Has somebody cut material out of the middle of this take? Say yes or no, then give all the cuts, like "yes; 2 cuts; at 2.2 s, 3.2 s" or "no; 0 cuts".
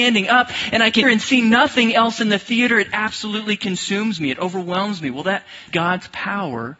yes; 2 cuts; at 1.0 s, 5.7 s